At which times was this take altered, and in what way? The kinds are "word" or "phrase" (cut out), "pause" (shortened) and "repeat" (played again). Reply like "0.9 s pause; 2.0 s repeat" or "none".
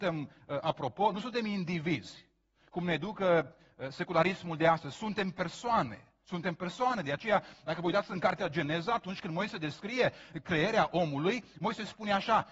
none